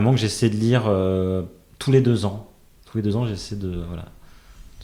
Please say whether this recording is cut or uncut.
uncut